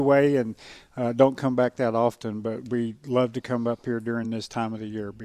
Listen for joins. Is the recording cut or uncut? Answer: uncut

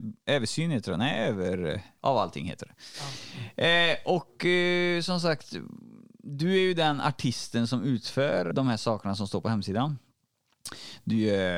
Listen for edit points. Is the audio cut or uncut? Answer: cut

